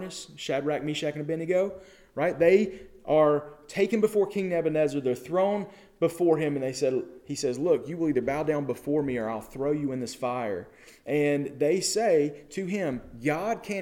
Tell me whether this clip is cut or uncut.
uncut